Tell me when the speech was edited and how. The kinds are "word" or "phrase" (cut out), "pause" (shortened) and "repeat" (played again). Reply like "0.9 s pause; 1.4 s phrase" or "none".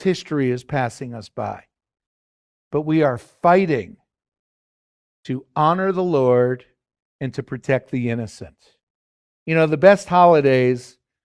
none